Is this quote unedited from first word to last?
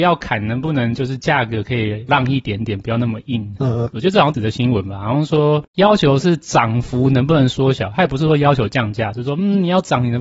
no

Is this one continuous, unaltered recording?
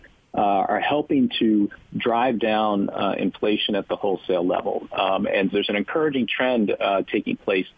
no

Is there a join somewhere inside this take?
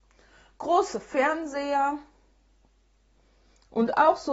no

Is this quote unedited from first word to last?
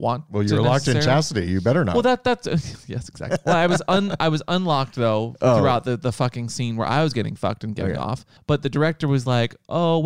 no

